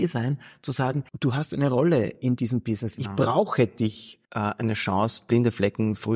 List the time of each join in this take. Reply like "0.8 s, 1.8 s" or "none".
1.1 s, 4.2 s